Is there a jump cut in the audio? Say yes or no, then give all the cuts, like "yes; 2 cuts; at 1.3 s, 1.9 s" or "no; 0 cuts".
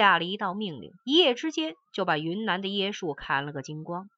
yes; 1 cut; at 1.0 s